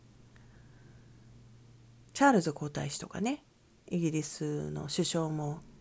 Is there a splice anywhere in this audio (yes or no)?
no